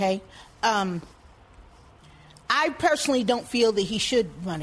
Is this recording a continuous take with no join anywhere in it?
yes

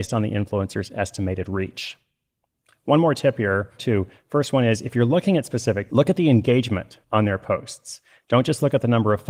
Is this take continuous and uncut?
no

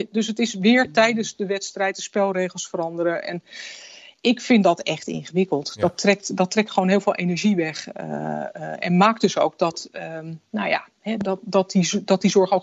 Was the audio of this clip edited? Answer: no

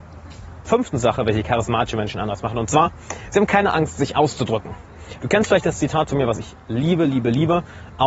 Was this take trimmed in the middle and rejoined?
no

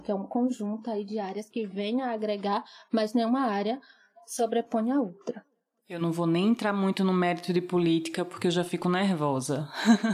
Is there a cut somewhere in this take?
no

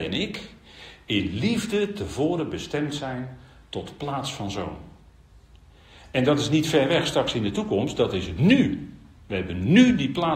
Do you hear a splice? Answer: no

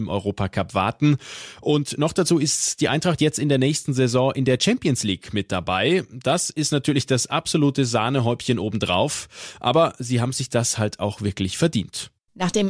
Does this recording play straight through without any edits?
yes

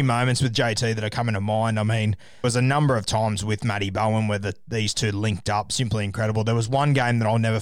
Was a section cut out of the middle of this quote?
yes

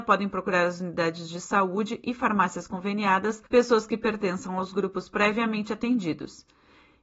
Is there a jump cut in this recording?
yes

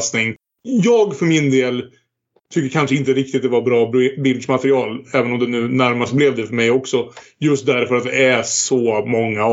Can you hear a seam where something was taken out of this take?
no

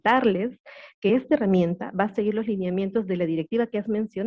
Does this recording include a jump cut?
no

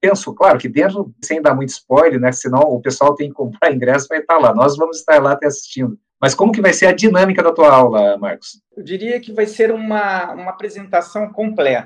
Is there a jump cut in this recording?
yes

